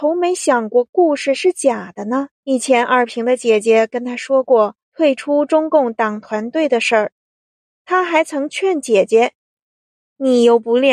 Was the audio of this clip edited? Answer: yes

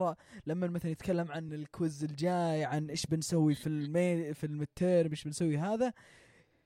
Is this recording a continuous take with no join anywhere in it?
yes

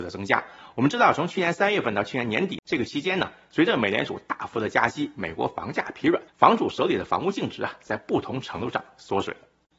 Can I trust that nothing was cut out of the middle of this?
no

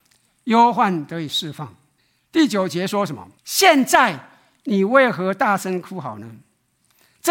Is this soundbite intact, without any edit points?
no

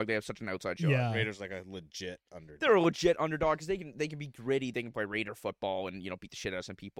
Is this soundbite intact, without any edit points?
yes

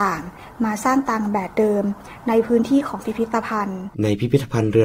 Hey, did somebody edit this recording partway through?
yes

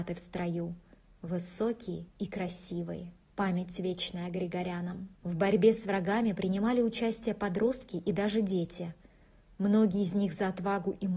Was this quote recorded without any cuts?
no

